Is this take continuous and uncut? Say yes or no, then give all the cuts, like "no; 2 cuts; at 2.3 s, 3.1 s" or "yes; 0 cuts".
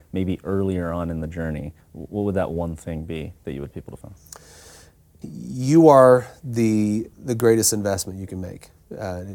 no; 5 cuts; at 1.8 s, 3.7 s, 4.0 s, 5.2 s, 7.1 s